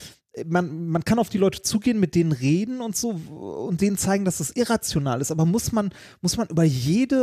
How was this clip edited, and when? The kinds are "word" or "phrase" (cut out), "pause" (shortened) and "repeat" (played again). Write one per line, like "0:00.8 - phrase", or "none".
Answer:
none

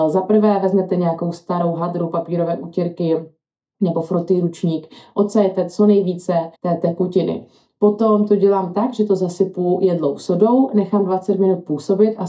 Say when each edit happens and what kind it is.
0:06.6 - pause

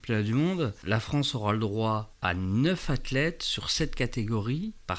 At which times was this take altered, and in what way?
none

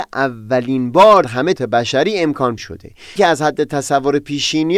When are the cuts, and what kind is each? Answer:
0:01.2 - word
0:01.6 - phrase
0:02.6 - word
0:03.2 - word

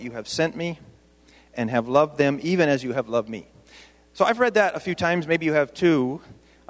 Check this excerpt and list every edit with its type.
none

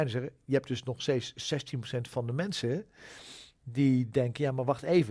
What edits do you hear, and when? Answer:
none

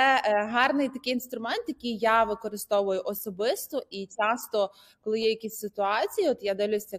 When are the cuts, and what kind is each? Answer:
none

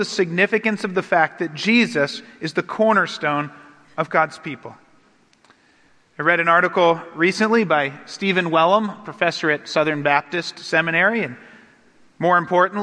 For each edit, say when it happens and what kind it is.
none

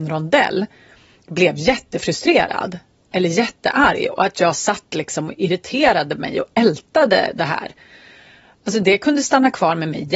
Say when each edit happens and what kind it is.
none

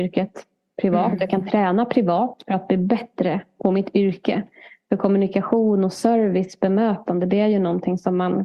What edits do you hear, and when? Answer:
none

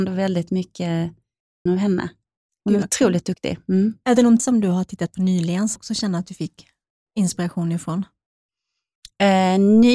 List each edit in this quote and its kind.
0:01.7 - word
0:04.4 - word
0:05.8 - word

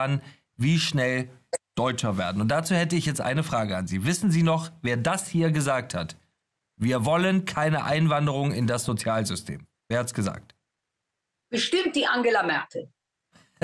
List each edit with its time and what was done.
none

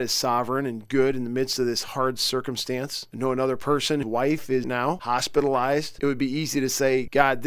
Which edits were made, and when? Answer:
0:04.0 - word
0:04.6 - phrase

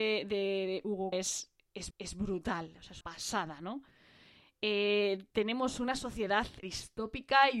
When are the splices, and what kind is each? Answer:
0:01.1 - word
0:01.9 - repeat
0:03.0 - word
0:05.3 - pause
0:06.6 - word

